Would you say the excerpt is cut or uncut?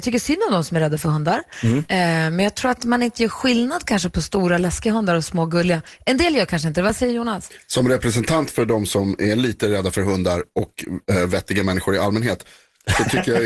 uncut